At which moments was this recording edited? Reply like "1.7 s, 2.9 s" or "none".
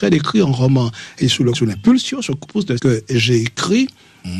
1.2 s, 1.5 s, 2.4 s, 2.8 s